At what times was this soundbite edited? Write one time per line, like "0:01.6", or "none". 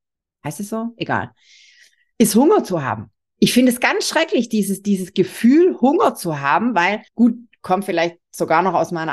0:07.1